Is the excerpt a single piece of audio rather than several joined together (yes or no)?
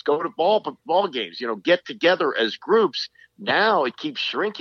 yes